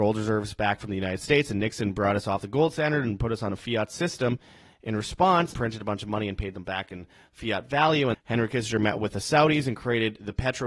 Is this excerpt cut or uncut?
cut